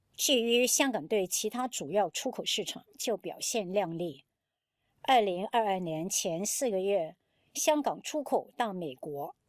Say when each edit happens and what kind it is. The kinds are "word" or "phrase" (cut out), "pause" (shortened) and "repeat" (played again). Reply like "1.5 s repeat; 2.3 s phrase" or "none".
none